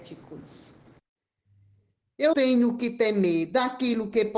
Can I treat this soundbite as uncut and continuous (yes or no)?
no